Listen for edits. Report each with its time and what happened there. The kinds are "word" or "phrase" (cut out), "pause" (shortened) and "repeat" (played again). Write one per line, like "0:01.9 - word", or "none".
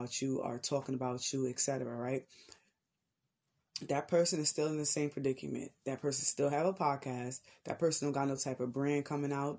none